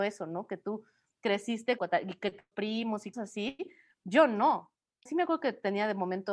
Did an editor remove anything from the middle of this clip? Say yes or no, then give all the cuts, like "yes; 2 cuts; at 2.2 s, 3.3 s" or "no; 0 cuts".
yes; 4 cuts; at 1.8 s, 2.5 s, 3.1 s, 5.1 s